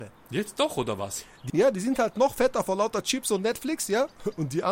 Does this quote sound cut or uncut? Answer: cut